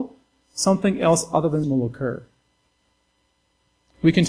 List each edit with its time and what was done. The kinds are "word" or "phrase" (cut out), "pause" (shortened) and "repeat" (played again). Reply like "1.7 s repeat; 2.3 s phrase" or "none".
1.6 s word